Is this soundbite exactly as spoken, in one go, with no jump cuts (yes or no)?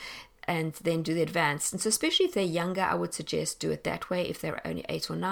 yes